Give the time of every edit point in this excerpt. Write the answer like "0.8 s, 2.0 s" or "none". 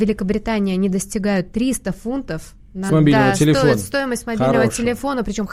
2.9 s